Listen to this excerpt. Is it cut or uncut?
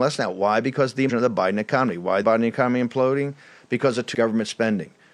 cut